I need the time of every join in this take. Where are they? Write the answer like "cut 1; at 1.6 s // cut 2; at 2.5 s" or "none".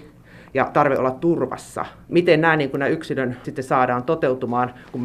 cut 1; at 2.1 s // cut 2; at 3.4 s